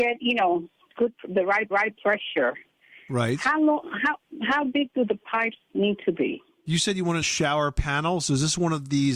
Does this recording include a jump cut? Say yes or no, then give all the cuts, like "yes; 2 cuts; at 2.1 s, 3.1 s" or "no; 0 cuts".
yes; 2 cuts; at 1.7 s, 7.2 s